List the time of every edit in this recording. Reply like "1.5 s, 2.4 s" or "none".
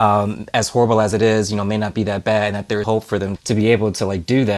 2.8 s, 3.4 s

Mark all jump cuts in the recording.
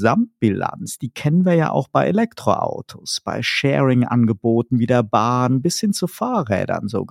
none

